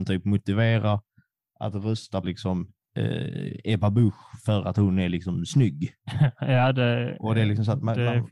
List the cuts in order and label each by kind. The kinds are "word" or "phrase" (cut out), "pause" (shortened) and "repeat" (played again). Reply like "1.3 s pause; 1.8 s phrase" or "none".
2.2 s word; 2.8 s pause; 6.0 s pause

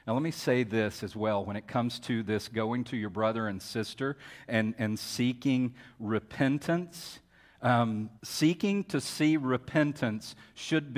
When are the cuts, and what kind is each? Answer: 8.2 s pause

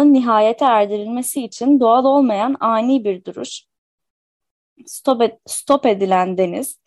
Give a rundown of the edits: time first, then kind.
none

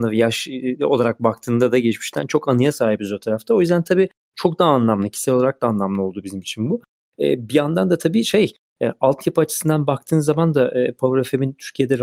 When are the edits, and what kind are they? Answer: none

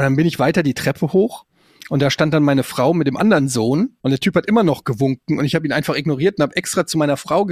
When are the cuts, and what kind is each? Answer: 4.0 s pause

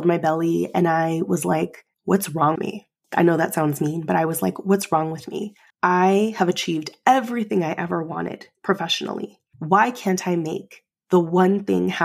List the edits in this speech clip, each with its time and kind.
1.9 s pause; 2.5 s word; 5.7 s pause

